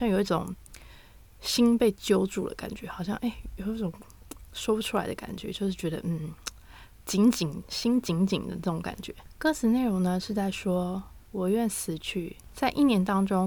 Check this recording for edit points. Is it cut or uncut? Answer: uncut